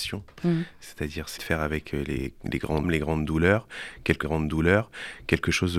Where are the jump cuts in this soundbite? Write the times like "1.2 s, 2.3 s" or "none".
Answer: 1.4 s, 2.8 s, 4.2 s